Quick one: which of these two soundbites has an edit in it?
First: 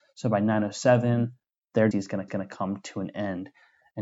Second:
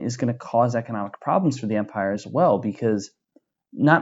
first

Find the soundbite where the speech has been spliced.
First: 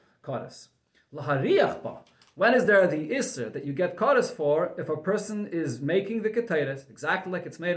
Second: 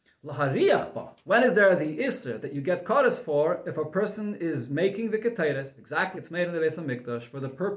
second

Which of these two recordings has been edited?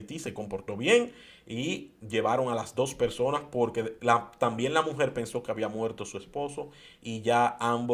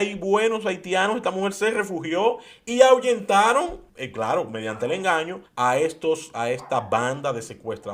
second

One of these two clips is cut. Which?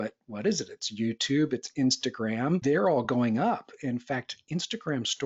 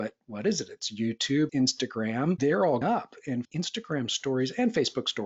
second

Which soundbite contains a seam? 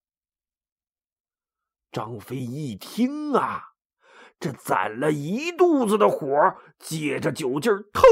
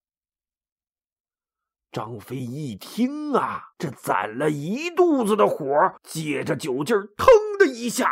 second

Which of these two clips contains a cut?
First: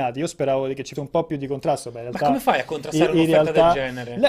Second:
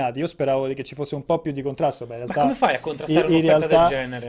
first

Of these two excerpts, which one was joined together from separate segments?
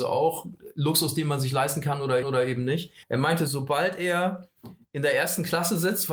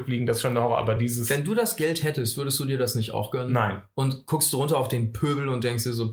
first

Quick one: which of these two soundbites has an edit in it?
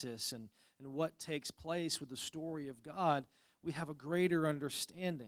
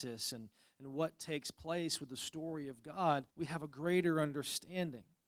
second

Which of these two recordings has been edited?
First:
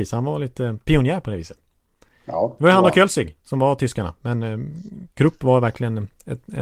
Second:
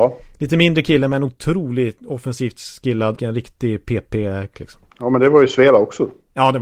second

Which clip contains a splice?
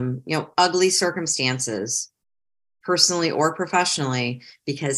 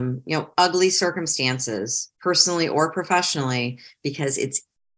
second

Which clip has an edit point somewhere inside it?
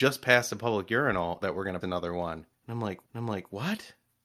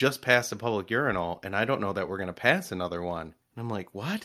first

